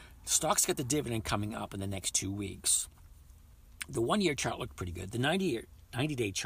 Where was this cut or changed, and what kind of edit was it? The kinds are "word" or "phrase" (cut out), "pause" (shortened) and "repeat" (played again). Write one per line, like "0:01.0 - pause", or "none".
none